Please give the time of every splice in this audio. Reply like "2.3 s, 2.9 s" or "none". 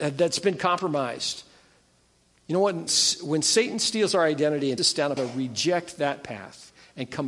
2.9 s, 4.8 s, 5.2 s